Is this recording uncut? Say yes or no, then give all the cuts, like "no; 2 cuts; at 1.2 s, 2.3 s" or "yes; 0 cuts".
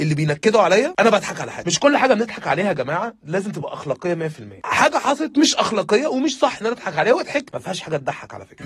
yes; 0 cuts